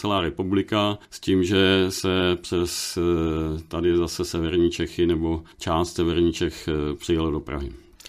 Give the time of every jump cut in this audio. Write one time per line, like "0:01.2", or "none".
0:01.0
0:05.5